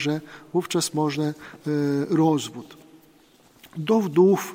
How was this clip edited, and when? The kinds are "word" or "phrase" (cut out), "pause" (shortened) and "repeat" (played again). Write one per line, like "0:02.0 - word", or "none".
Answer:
0:01.6 - word